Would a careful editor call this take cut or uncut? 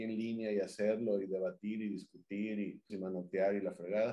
cut